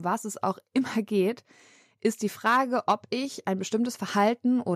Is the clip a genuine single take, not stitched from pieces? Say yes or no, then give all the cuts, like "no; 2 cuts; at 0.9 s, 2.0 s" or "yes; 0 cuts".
yes; 0 cuts